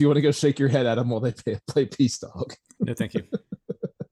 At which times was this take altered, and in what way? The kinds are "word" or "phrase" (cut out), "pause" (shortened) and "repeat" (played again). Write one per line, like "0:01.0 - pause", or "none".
none